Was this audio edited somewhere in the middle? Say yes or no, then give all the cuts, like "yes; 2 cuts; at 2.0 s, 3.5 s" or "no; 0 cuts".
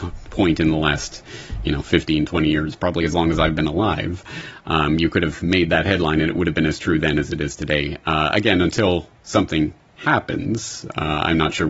no; 0 cuts